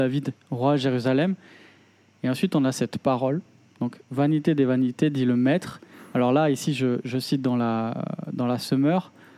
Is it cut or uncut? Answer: uncut